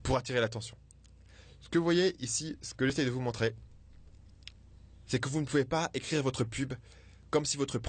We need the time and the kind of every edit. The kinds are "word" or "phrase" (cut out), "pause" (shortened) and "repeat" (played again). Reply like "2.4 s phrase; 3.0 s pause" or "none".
none